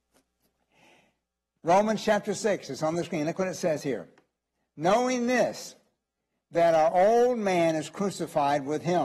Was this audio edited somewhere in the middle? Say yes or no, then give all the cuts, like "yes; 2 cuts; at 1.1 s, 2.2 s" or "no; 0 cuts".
no; 0 cuts